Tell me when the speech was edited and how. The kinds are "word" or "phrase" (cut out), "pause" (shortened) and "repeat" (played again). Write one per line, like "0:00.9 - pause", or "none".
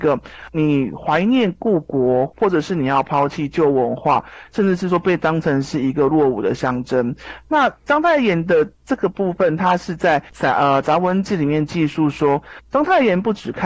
0:07.8 - pause

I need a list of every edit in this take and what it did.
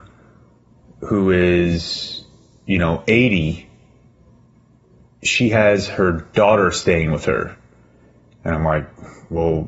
none

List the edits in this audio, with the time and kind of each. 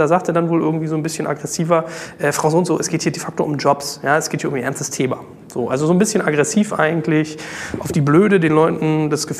none

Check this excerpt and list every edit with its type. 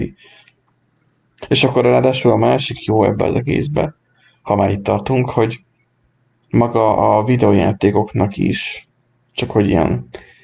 none

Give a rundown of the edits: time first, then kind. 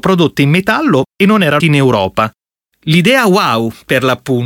0:01.6 - phrase

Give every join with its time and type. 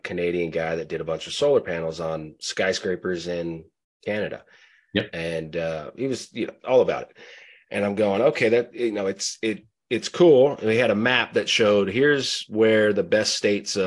none

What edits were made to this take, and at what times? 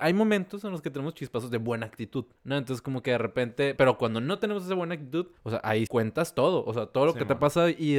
0:02.4 - pause
0:03.8 - word
0:05.4 - pause
0:05.9 - word

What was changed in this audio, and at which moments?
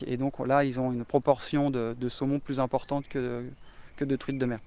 none

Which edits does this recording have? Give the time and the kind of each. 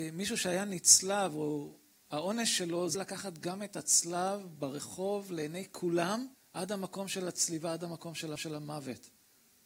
0:01.9 - pause
0:02.9 - word
0:06.3 - pause
0:08.4 - repeat

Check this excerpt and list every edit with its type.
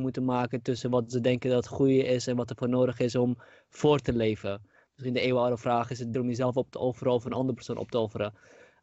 0:06.1 - word

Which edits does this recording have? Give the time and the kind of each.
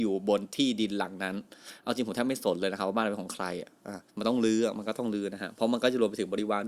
0:04.1 - pause

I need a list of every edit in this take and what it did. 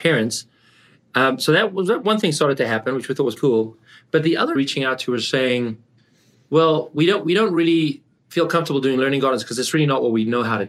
0:03.4 - word
0:04.6 - phrase

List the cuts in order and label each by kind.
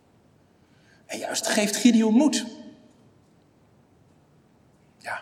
0:01.4 - word

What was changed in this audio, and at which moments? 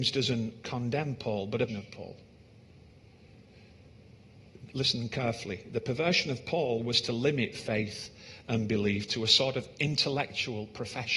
0:01.7 - word

